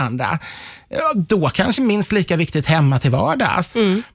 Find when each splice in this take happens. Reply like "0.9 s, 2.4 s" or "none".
1.8 s